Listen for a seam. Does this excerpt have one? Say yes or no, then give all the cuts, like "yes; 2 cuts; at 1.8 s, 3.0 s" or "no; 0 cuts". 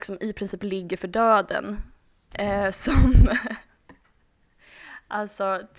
no; 0 cuts